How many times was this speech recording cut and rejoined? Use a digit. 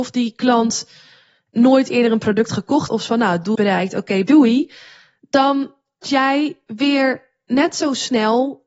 4